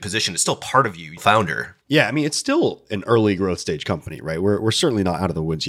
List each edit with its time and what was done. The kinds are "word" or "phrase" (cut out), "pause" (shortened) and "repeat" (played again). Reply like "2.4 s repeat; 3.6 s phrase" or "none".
1.2 s word; 1.8 s pause